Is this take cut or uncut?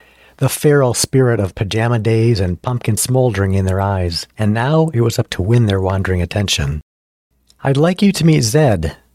cut